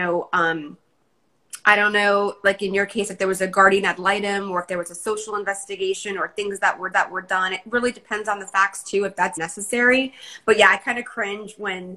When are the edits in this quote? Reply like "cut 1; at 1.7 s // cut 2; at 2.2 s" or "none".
cut 1; at 6.9 s // cut 2; at 9.4 s